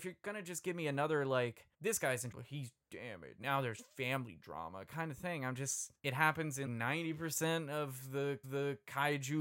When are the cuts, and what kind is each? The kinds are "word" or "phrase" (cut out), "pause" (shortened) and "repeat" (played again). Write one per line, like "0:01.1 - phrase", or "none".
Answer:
0:01.7 - pause
0:02.3 - phrase
0:03.4 - word
0:06.0 - pause
0:06.7 - word
0:08.4 - repeat